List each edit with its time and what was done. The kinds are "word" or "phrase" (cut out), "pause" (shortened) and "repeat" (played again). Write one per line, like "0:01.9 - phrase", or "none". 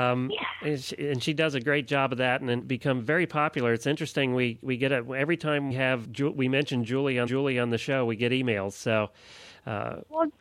0:02.6 - phrase
0:05.7 - word
0:06.0 - word
0:07.3 - repeat